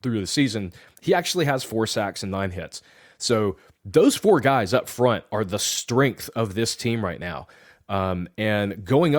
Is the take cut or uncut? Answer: uncut